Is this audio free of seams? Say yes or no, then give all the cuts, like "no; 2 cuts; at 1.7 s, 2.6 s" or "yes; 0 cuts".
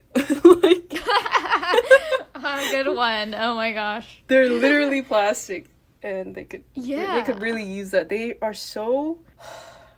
yes; 0 cuts